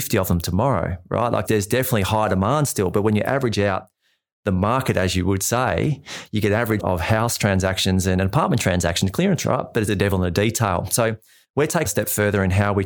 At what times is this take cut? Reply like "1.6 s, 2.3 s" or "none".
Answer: 1.5 s, 6.8 s, 9.4 s, 9.9 s, 11.9 s